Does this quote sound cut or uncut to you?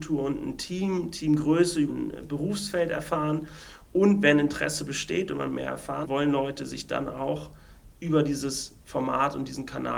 cut